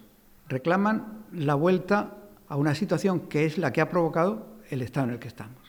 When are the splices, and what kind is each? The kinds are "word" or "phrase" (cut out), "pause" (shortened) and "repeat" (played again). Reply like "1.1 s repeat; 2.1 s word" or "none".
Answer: none